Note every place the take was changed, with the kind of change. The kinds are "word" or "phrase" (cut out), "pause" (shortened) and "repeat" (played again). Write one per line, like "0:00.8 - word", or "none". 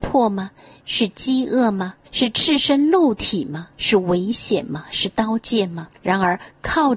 0:02.0 - pause
0:03.7 - pause
0:05.9 - pause